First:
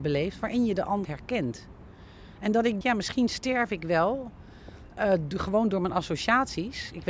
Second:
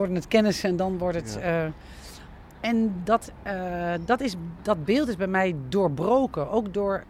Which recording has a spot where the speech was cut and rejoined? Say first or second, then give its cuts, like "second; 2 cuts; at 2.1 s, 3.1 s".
first; 2 cuts; at 1.0 s, 2.8 s